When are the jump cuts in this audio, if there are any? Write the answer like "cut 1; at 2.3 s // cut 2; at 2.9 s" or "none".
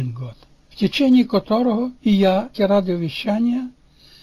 cut 1; at 2.0 s // cut 2; at 2.5 s